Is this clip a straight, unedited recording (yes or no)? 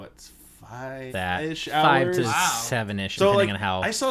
no